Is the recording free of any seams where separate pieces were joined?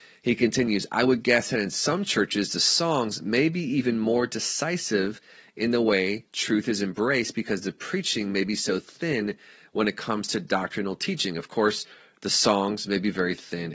yes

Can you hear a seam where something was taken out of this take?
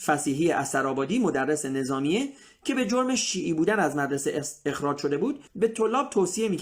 yes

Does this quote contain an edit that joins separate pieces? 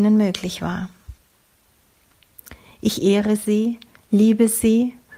no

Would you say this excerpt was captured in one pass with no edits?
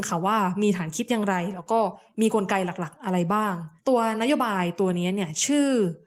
no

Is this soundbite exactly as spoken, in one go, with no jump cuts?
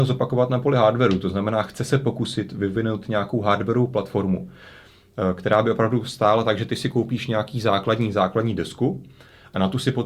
yes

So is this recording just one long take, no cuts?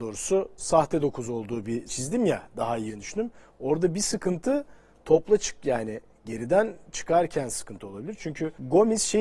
no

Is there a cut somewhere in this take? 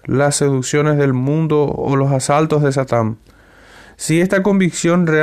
no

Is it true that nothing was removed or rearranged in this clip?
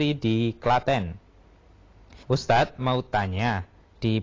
no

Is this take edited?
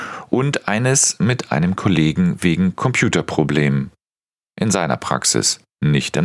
no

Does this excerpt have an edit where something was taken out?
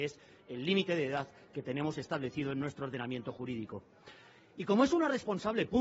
no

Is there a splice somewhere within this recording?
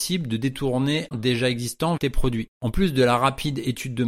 yes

